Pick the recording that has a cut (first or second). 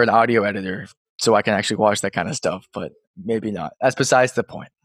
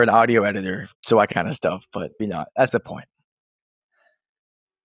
second